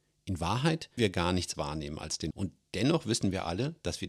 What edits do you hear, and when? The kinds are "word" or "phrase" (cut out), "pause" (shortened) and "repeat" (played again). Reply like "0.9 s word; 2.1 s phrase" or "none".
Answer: 1.0 s word; 1.5 s word; 2.3 s word